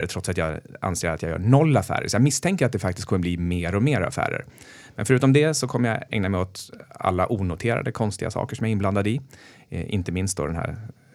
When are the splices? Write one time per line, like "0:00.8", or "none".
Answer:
none